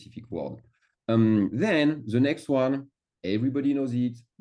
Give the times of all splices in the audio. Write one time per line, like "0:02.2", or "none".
none